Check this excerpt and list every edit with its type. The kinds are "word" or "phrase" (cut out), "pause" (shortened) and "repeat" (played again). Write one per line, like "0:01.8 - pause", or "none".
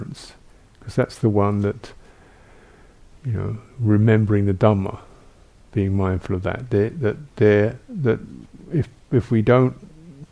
none